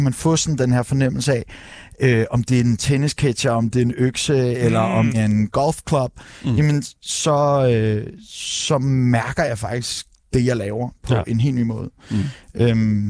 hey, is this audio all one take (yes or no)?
no